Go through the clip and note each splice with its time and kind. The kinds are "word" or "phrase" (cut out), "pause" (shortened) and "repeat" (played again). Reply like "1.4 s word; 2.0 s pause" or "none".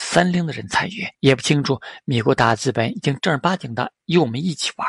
1.1 s pause